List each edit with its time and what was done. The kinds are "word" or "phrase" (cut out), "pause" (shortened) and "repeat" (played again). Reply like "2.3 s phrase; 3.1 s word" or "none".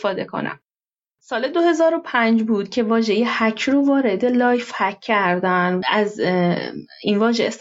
5.8 s word

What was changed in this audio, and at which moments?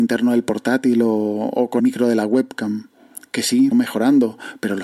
1.8 s word; 3.7 s word

